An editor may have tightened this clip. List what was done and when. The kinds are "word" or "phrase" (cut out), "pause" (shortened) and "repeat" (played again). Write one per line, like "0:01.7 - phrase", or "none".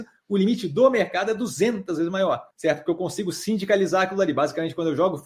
0:02.5 - pause